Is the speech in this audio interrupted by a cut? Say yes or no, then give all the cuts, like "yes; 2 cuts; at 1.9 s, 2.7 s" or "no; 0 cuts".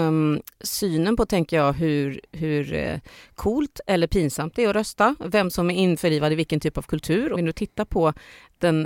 yes; 1 cut; at 7.4 s